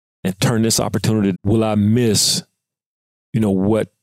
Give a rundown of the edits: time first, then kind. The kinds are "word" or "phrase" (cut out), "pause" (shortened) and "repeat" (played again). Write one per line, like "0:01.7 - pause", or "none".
0:01.3 - word